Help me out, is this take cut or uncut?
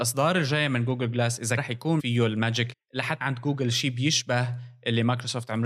cut